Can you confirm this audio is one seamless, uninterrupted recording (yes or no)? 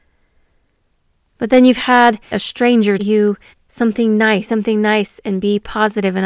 no